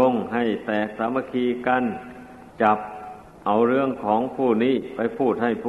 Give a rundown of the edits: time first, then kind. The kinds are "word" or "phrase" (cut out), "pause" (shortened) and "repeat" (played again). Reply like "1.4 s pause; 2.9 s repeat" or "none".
2.5 s pause; 3.4 s pause